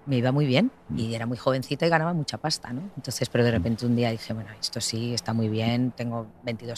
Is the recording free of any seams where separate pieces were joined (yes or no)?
yes